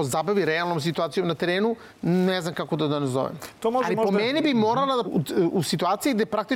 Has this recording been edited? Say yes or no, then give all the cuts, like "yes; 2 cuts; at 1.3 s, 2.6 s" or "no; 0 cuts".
yes; 2 cuts; at 1.9 s, 5.0 s